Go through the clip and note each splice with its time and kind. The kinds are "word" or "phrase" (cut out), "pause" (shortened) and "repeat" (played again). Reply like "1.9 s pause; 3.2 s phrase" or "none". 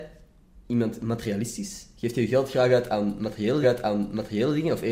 3.6 s repeat